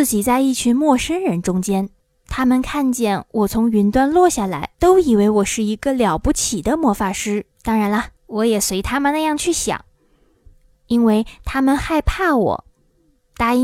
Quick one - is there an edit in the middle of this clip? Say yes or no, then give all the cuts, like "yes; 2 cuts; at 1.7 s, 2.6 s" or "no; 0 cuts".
yes; 4 cuts; at 2.0 s, 4.7 s, 7.5 s, 8.2 s